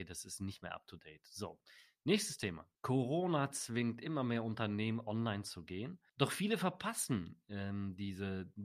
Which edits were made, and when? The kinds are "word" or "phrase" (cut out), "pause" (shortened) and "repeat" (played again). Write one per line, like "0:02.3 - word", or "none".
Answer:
0:02.7 - pause
0:06.1 - pause